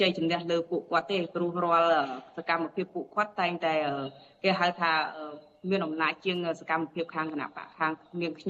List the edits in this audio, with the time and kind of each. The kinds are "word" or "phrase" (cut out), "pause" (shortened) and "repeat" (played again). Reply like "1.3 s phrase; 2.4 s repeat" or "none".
none